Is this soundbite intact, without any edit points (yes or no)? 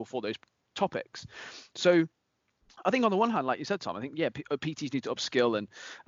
yes